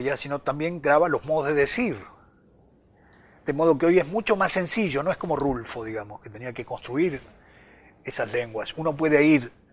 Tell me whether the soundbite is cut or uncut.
uncut